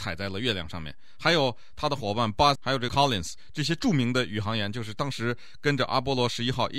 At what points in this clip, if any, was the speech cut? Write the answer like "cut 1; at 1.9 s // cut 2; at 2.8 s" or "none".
cut 1; at 2.6 s // cut 2; at 2.9 s